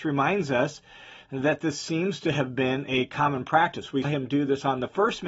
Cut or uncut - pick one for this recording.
cut